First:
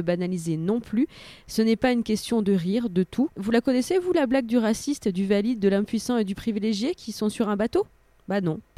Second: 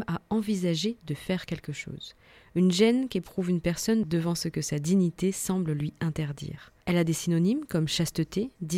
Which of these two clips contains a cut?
second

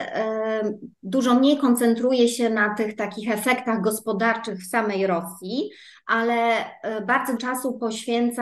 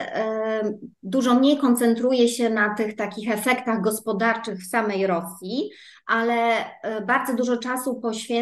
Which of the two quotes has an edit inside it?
first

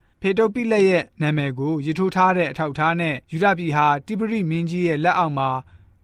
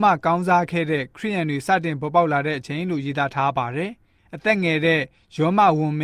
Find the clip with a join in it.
first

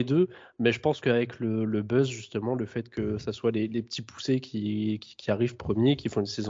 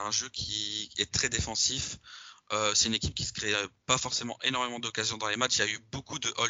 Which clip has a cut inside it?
second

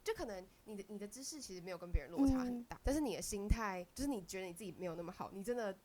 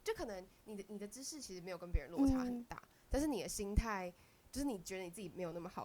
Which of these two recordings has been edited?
first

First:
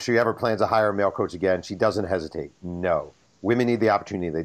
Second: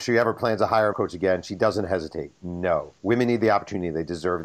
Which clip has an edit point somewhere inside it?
second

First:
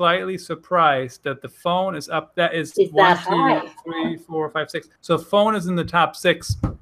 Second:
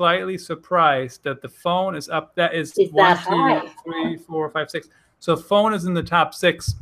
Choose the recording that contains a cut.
first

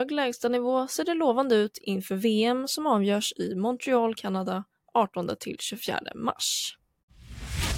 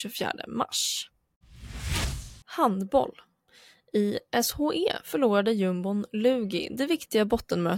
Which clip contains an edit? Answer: second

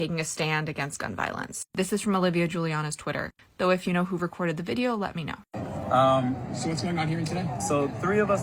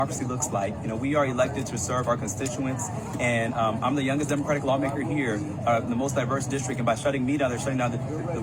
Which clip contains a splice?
first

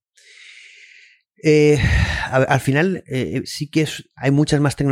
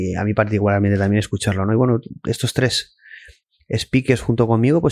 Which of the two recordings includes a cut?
first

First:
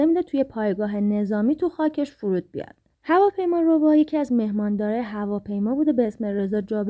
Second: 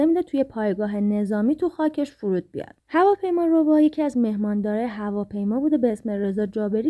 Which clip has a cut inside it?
second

